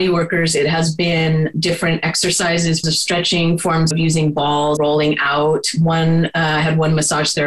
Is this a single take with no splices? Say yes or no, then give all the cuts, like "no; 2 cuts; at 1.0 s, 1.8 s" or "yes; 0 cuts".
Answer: no; 4 cuts; at 1.5 s, 2.8 s, 3.9 s, 4.8 s